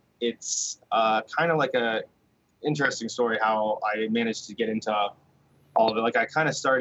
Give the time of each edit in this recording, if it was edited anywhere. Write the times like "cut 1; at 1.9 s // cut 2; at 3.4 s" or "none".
none